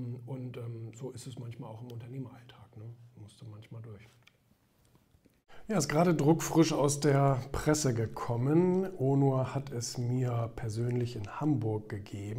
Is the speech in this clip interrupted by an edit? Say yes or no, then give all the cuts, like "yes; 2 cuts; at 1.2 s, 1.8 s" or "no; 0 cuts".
no; 0 cuts